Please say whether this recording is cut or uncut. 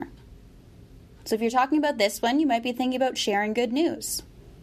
uncut